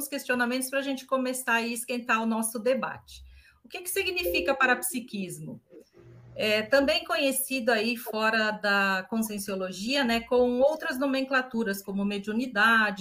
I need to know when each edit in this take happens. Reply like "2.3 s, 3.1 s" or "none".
none